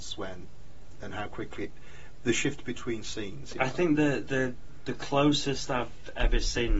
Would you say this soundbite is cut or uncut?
uncut